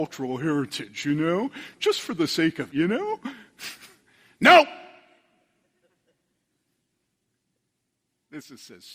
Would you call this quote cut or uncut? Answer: cut